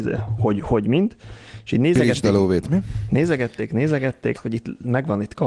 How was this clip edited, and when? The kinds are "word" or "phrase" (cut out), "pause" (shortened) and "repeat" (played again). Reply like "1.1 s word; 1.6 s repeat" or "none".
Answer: 4.3 s word